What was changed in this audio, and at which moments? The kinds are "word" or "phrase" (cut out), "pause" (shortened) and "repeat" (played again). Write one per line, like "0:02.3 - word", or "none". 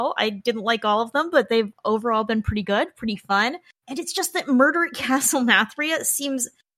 none